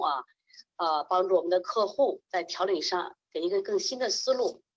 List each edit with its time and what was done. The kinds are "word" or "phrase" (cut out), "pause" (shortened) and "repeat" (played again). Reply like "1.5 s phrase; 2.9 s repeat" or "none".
2.2 s pause; 3.2 s pause